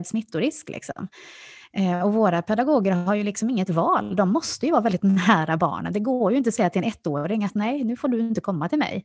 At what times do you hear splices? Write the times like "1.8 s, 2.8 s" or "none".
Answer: none